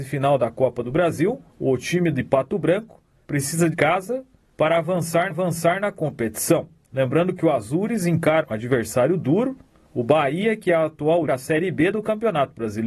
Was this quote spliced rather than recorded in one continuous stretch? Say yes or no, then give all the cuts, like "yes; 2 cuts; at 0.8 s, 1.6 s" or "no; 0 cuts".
yes; 5 cuts; at 1.5 s, 3.7 s, 5.3 s, 8.4 s, 11.3 s